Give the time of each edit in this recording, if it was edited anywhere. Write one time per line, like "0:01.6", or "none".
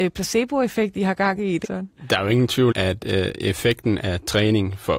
0:01.6
0:02.7
0:04.0